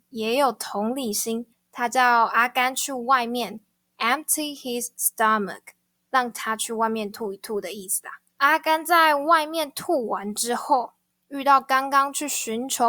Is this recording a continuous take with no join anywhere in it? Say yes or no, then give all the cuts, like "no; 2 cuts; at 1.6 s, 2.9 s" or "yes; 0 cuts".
no; 2 cuts; at 1.5 s, 8.3 s